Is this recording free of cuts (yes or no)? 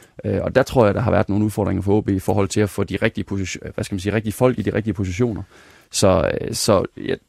yes